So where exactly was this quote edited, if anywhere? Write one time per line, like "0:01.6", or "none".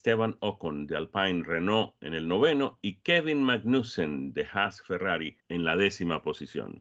0:05.4